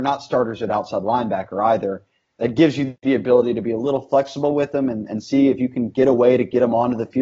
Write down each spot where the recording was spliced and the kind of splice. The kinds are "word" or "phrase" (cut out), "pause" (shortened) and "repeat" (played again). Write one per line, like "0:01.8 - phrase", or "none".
none